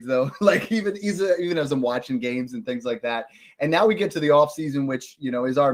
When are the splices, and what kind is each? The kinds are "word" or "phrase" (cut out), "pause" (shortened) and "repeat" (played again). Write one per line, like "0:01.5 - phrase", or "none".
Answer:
none